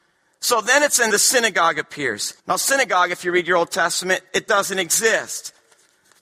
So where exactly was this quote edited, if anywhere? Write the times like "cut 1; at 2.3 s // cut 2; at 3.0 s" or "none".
cut 1; at 1.1 s // cut 2; at 2.4 s